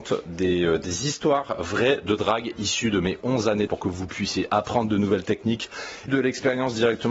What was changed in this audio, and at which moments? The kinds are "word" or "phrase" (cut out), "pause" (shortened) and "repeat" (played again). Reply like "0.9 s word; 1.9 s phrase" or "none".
3.7 s word; 6.1 s word